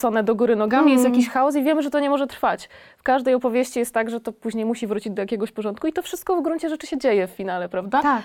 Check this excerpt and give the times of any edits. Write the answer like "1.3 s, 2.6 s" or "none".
none